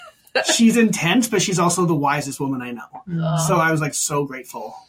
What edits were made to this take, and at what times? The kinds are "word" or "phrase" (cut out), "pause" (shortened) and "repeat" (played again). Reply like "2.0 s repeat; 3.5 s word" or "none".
none